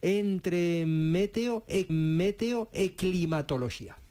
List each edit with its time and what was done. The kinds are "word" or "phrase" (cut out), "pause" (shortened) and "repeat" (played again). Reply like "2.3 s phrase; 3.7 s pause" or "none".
1.9 s repeat

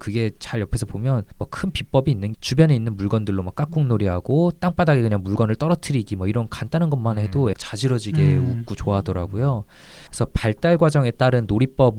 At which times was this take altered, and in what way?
1.3 s pause; 2.3 s phrase; 7.5 s phrase; 10.1 s pause

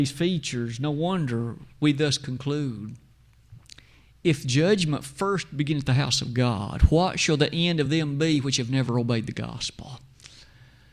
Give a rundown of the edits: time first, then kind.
none

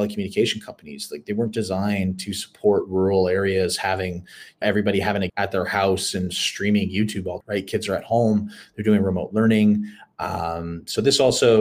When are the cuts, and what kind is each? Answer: 4.6 s word; 5.3 s word; 7.4 s word

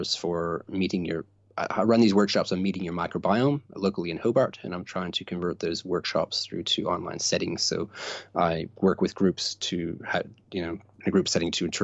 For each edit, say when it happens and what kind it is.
none

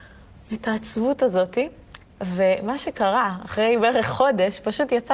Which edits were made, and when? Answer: 2.0 s pause

